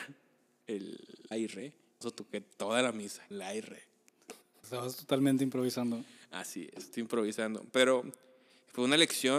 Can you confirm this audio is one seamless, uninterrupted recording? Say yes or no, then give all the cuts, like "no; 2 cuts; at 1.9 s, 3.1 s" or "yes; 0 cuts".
no; 5 cuts; at 1.3 s, 2.0 s, 3.3 s, 4.6 s, 6.9 s